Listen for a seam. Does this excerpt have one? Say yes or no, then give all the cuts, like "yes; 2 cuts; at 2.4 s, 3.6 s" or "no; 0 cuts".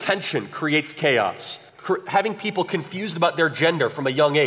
yes; 1 cut; at 1.7 s